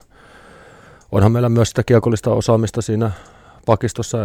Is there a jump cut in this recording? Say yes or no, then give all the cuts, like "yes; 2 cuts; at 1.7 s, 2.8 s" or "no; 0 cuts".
no; 0 cuts